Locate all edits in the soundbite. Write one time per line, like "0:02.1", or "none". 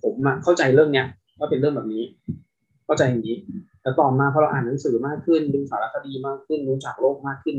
none

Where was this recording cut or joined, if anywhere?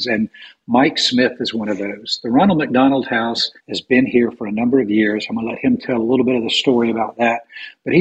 0:03.6

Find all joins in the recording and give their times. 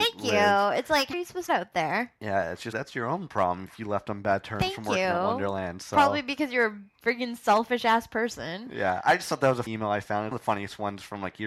0:01.1
0:01.5
0:02.7
0:09.7
0:10.3

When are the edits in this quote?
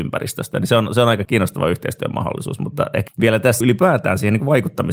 0:01.2
0:03.1
0:03.6

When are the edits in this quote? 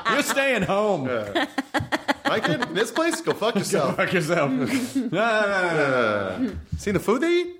none

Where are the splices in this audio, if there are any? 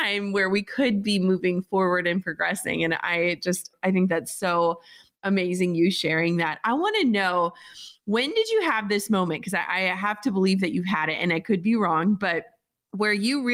none

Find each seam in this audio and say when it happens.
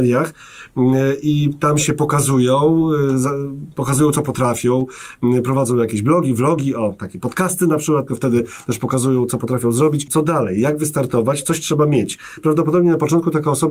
0:08.1

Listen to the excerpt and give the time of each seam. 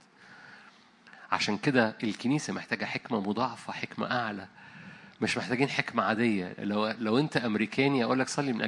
none

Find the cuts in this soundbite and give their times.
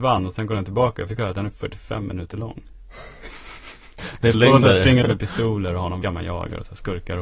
0:04.3
0:05.0
0:06.0

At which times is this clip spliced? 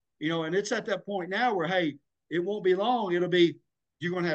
none

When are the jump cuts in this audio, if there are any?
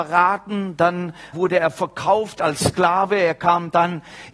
0:01.3

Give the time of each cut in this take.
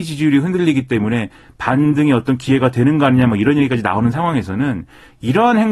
none

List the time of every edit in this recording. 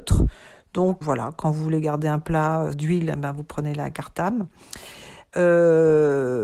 0:01.0
0:02.7

